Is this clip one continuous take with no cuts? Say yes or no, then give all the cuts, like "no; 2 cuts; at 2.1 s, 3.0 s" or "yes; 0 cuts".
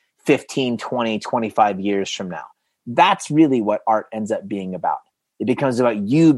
yes; 0 cuts